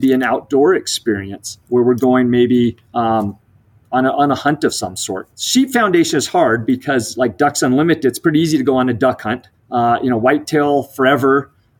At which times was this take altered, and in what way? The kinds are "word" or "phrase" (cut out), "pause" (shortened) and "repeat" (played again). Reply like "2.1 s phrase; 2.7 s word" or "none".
1.6 s pause; 2.8 s pause; 5.3 s pause; 9.5 s pause